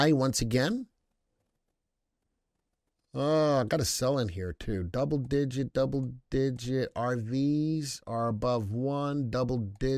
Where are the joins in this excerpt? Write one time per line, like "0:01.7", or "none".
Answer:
none